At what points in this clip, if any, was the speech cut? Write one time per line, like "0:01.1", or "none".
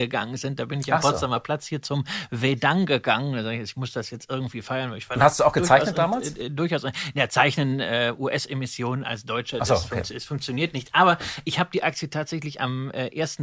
none